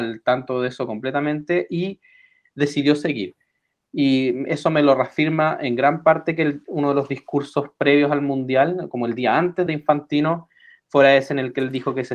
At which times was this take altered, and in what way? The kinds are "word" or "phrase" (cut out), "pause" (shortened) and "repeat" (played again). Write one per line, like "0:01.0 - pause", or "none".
0:09.7 - phrase